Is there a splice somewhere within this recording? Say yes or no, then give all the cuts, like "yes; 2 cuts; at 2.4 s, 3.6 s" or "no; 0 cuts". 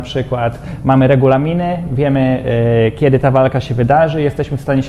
no; 0 cuts